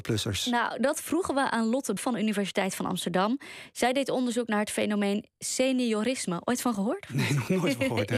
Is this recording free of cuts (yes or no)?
no